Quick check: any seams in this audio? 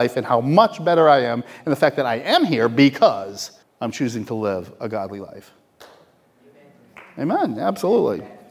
yes; 1 cut; at 3.6 s

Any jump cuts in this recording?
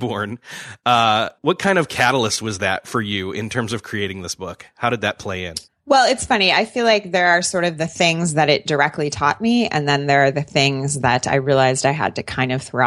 yes; 2 cuts; at 1.4 s, 5.7 s

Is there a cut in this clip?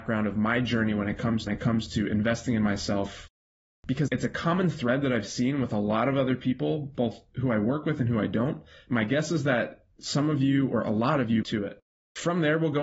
yes; 3 cuts; at 1.5 s, 4.1 s, 11.4 s

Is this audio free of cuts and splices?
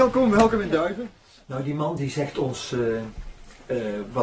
yes; 0 cuts

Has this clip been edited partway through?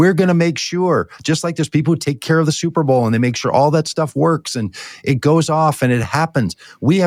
no; 0 cuts

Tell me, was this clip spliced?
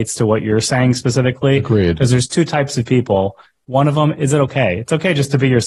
no; 0 cuts

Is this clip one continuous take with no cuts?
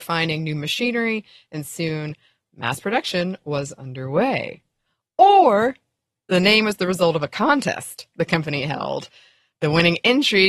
yes; 0 cuts

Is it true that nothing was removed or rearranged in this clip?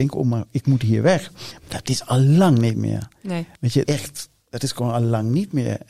no; 2 cuts; at 3.5 s, 3.8 s

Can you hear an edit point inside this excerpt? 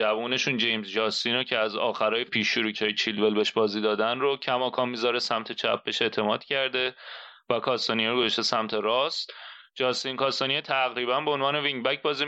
yes; 2 cuts; at 2.3 s, 2.7 s

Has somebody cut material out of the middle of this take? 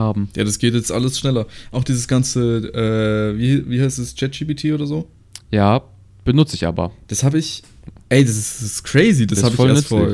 no; 0 cuts

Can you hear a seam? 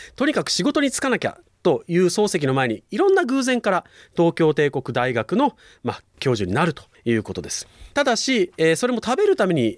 no; 0 cuts

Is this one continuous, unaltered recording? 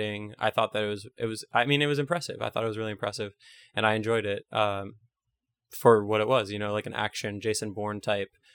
yes; 0 cuts

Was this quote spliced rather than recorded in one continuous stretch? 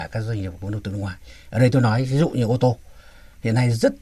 no; 0 cuts

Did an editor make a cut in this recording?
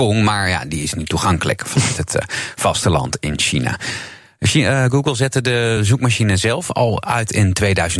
no; 0 cuts

